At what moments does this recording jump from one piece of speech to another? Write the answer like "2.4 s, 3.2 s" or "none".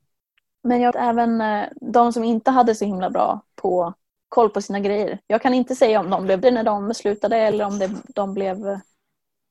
0.9 s, 4.2 s, 6.4 s